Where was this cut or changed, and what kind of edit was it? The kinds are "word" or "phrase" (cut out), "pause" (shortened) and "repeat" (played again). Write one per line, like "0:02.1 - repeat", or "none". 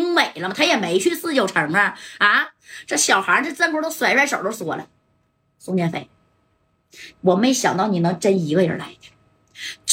none

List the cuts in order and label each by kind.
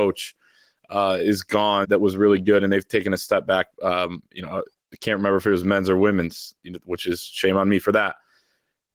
0:01.8 - word
0:06.6 - word

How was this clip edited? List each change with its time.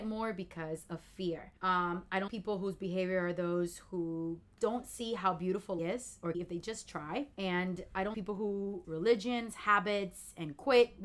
0:01.6 - pause
0:02.3 - word
0:05.8 - phrase
0:06.3 - phrase
0:07.3 - pause
0:08.1 - word
0:08.8 - phrase

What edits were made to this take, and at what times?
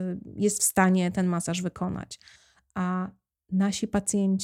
none

